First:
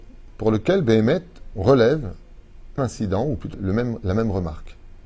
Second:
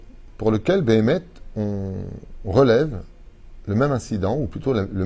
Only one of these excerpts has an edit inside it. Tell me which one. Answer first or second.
first